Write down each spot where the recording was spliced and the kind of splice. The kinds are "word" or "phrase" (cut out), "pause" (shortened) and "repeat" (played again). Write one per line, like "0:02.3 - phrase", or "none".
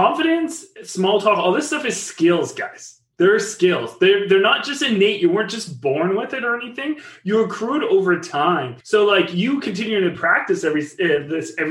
0:08.8 - pause